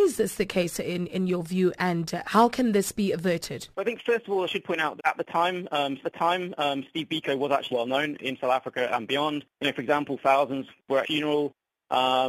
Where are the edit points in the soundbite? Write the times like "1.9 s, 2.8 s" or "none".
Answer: 2.2 s, 3.7 s, 5.0 s, 6.0 s, 7.7 s, 9.5 s, 11.0 s